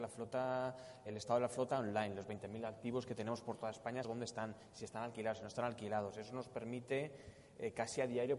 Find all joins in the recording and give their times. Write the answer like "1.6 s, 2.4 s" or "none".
1.1 s, 4.0 s